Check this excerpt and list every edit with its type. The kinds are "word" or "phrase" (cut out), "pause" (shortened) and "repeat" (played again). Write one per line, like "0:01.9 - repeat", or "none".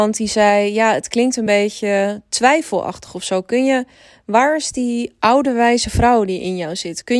none